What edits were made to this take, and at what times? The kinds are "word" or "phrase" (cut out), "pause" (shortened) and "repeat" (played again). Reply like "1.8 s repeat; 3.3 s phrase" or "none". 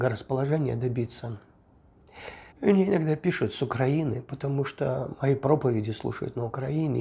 2.5 s pause